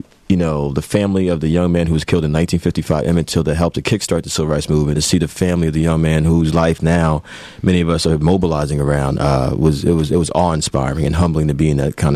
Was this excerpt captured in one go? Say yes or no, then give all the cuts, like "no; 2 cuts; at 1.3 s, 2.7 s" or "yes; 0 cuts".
no; 1 cut; at 4.9 s